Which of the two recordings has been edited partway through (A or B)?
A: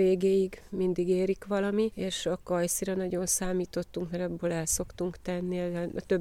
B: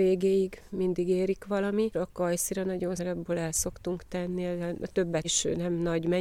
B